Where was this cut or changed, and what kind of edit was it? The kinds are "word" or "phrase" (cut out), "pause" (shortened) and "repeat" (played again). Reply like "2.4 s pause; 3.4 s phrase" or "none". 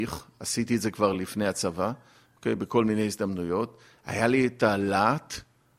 none